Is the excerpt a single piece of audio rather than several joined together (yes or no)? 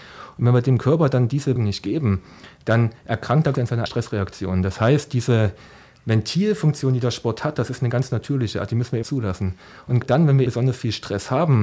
no